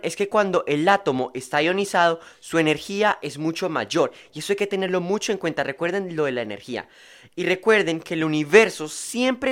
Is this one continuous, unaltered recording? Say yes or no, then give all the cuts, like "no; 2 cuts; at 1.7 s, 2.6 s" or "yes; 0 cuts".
yes; 0 cuts